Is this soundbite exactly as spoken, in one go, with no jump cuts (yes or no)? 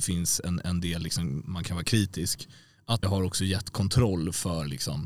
no